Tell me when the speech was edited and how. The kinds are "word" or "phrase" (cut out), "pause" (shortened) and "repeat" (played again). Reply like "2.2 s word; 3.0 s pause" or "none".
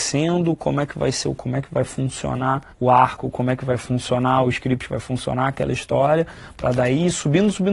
1.4 s word; 2.7 s pause; 4.9 s phrase